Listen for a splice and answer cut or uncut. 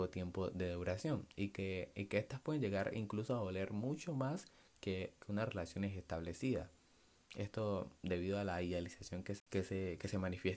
uncut